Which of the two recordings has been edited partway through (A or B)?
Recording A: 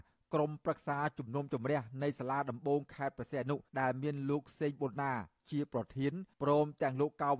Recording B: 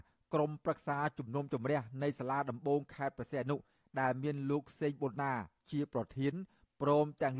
A